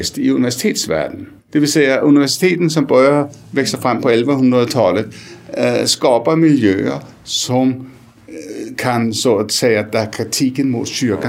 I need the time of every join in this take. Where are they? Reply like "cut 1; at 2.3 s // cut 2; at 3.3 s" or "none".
cut 1; at 1.4 s

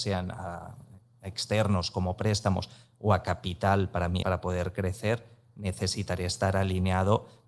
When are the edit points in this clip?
cut 1; at 4.2 s

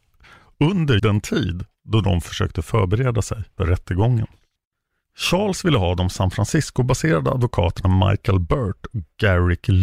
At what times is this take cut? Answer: cut 1; at 1.0 s // cut 2; at 3.6 s

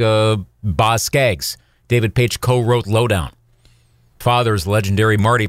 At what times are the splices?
cut 1; at 4.2 s

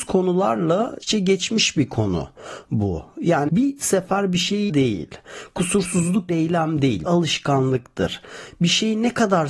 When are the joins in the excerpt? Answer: cut 1; at 1.0 s // cut 2; at 3.5 s // cut 3; at 4.7 s // cut 4; at 6.3 s // cut 5; at 7.1 s

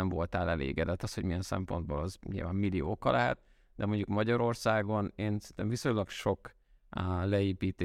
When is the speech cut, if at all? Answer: none

